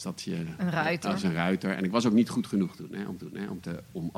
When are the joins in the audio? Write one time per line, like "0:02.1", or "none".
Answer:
0:03.2